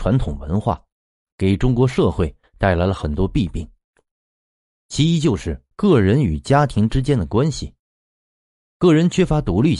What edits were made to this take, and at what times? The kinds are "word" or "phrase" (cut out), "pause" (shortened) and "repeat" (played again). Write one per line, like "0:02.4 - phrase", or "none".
0:05.7 - pause